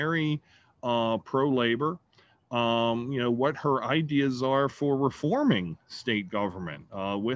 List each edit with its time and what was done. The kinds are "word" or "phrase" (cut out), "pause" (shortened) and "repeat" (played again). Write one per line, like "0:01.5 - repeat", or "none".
none